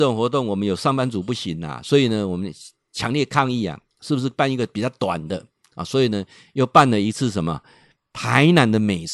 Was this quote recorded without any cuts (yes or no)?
yes